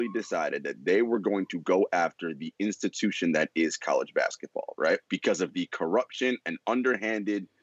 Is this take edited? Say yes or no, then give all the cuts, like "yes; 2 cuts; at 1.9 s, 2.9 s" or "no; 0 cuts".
yes; 1 cut; at 5.0 s